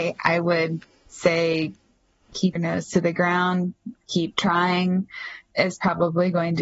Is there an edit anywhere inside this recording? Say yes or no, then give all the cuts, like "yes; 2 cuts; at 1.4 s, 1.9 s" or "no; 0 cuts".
yes; 1 cut; at 2.6 s